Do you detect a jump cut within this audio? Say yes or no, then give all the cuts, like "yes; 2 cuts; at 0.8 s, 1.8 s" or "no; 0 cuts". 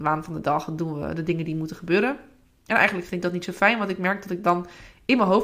no; 0 cuts